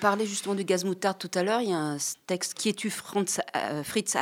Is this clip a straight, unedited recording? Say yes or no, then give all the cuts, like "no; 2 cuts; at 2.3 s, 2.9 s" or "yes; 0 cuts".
no; 1 cut; at 2.6 s